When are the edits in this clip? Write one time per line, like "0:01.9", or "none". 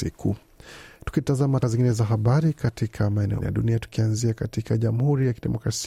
0:01.6
0:03.4